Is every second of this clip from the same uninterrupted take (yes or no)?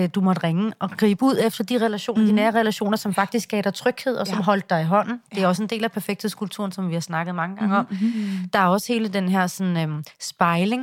yes